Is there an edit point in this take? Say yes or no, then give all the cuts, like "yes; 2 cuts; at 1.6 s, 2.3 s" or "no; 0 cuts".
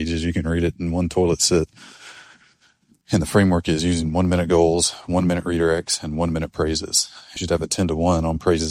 yes; 1 cut; at 7.4 s